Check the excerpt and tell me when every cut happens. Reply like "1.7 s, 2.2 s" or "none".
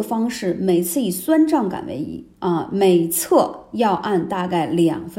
2.3 s